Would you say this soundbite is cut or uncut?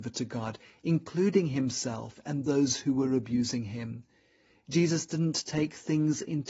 uncut